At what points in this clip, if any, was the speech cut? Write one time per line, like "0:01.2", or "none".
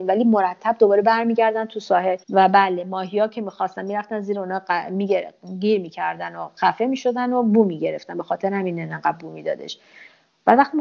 0:02.2